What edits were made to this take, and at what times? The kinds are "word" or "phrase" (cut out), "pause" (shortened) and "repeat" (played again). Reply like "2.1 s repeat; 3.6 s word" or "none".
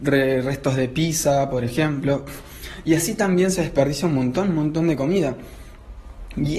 none